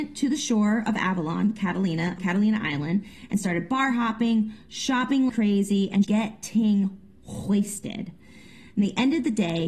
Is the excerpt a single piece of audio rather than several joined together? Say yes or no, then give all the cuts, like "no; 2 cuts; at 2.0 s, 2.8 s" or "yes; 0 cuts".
no; 3 cuts; at 2.2 s, 5.3 s, 6.0 s